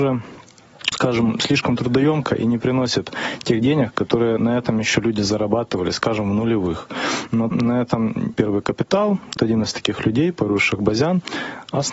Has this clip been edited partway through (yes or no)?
yes